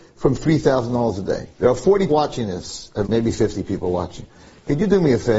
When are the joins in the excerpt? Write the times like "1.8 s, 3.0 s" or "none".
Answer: 1.5 s, 2.1 s, 3.0 s